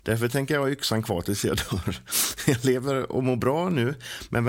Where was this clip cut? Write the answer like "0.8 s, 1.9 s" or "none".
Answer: none